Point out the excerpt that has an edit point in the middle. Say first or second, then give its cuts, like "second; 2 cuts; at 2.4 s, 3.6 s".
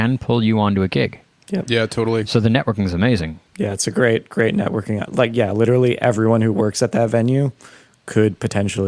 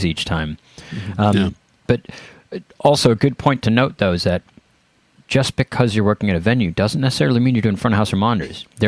first; 1 cut; at 3.5 s